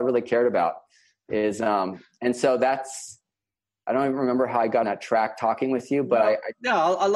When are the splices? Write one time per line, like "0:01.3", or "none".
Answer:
0:04.8

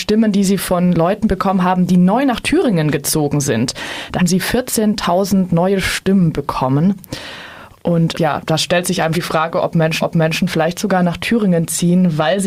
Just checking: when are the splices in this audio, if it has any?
0:04.2
0:08.1
0:09.1
0:10.0

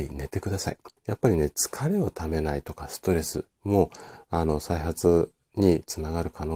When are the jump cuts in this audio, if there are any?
0:01.0

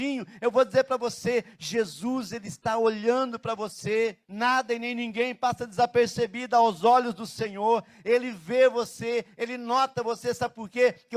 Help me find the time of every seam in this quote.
0:04.2

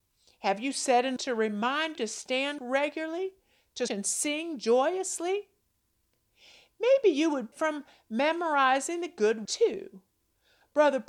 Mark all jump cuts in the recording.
0:01.2
0:02.0
0:02.6
0:03.9
0:07.5
0:09.5

